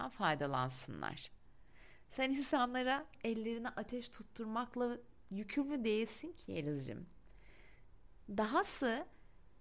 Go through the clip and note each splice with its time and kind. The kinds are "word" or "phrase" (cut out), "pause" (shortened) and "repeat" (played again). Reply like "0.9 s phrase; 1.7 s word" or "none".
3.1 s word